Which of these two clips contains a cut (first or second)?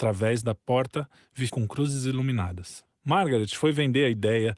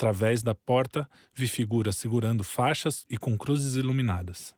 first